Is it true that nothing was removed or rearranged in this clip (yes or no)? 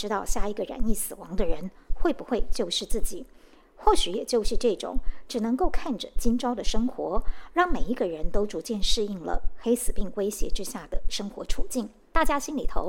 yes